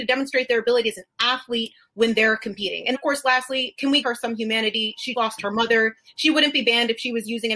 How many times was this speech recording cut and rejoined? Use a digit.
3